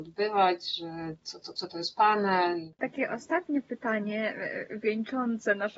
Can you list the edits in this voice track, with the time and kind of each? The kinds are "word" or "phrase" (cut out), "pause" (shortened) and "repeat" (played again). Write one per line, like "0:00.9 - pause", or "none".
none